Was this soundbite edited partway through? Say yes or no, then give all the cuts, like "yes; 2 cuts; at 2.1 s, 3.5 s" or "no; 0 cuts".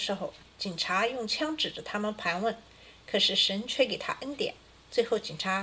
no; 0 cuts